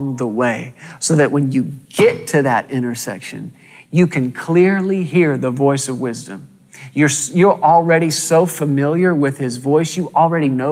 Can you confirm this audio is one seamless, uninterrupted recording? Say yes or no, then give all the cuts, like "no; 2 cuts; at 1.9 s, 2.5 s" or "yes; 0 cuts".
yes; 0 cuts